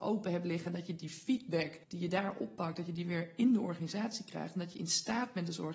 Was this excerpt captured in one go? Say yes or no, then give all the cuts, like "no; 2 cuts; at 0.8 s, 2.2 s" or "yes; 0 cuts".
no; 1 cut; at 1.8 s